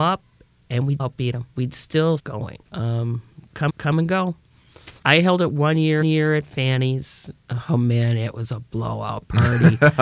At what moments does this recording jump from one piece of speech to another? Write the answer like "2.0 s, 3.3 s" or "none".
1.0 s, 1.5 s, 2.2 s, 2.6 s, 3.7 s, 5.0 s, 6.0 s

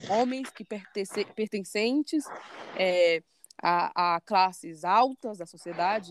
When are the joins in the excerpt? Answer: none

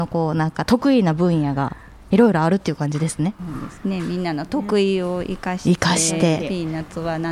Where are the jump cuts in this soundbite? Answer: none

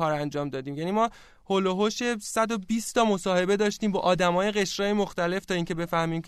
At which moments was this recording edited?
none

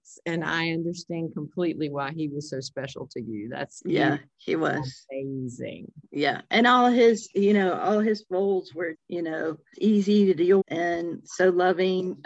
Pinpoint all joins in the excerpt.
8.9 s, 9.7 s, 10.6 s

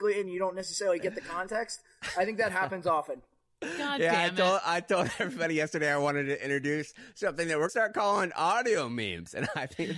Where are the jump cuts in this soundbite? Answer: 7.7 s

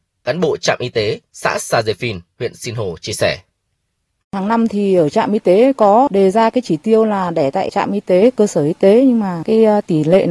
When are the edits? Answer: none

